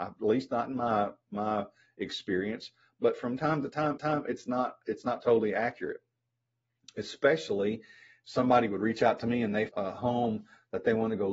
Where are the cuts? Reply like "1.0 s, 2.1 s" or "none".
4.0 s, 9.7 s

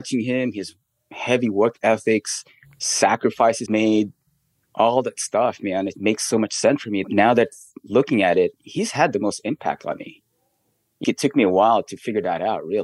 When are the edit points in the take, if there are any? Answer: 3.7 s, 5.9 s, 7.0 s, 8.6 s, 11.0 s

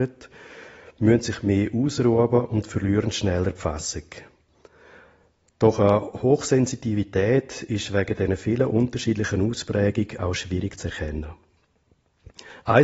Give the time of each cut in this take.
none

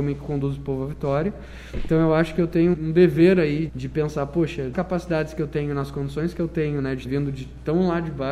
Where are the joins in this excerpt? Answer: 2.7 s, 3.7 s, 4.7 s, 7.0 s

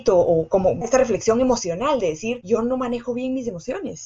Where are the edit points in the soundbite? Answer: none

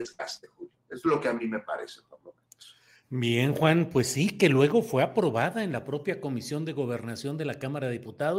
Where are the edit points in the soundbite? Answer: none

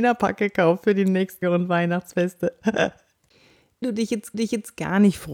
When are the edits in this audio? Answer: 1.4 s, 3.8 s, 4.3 s

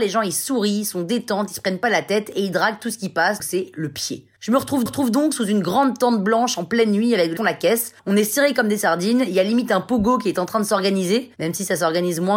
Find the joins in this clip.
3.4 s, 4.3 s, 4.9 s, 7.4 s, 8.0 s, 11.3 s

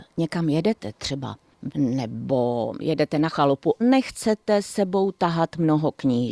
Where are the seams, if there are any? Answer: 1.7 s, 3.3 s, 3.8 s

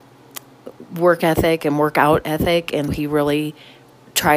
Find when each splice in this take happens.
2.9 s

